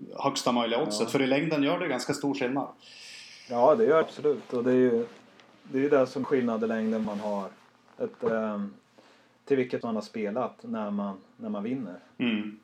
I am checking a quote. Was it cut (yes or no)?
yes